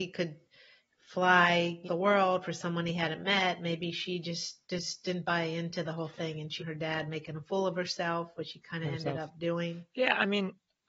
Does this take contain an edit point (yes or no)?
yes